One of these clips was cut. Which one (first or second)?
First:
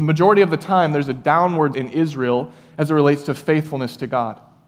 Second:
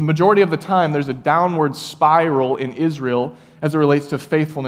first